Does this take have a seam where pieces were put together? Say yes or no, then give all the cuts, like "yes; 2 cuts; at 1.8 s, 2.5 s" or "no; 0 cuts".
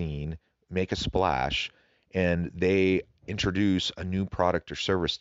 no; 0 cuts